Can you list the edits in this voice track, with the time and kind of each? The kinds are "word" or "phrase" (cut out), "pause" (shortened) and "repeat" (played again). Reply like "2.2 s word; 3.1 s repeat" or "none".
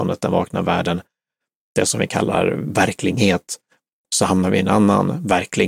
none